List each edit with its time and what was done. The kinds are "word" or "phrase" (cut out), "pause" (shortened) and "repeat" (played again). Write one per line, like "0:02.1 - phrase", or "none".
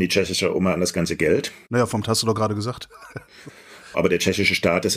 0:02.0 - word
0:03.9 - word